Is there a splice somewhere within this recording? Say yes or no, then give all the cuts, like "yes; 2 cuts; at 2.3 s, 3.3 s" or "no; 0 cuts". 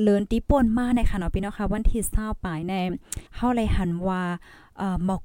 yes; 1 cut; at 3.3 s